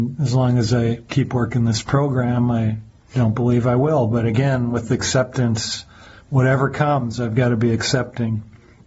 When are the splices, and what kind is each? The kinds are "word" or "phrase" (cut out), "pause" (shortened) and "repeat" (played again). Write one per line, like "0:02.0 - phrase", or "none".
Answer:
none